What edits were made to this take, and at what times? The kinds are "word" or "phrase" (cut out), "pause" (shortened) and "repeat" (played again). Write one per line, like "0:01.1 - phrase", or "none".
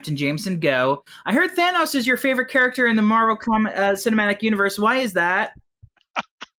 none